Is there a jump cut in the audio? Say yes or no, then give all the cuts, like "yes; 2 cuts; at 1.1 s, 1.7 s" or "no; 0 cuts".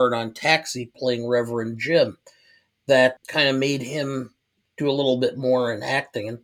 no; 0 cuts